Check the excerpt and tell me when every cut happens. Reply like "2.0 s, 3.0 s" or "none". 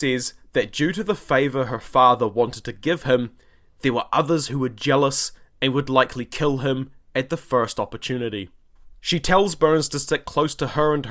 none